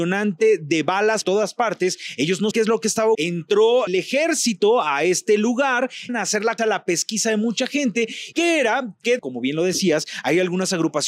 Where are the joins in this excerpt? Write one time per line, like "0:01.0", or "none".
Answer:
0:01.2
0:02.5
0:03.1
0:03.9
0:06.1
0:06.6
0:08.3
0:09.2